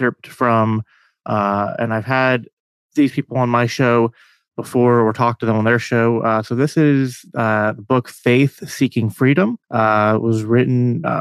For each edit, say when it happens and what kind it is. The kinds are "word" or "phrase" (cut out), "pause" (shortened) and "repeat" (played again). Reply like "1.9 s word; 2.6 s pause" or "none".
9.6 s pause